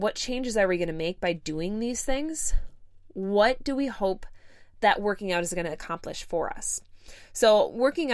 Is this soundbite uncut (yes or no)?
yes